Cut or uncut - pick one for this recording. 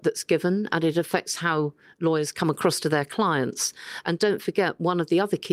uncut